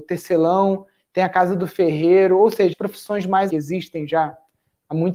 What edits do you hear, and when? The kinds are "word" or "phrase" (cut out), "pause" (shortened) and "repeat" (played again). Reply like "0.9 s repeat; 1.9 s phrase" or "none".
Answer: 2.7 s word; 3.5 s phrase